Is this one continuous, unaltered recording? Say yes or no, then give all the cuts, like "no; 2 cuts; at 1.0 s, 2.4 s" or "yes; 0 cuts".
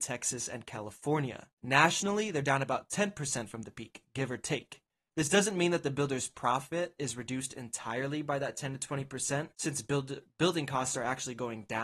no; 3 cuts; at 1.5 s, 4.9 s, 9.5 s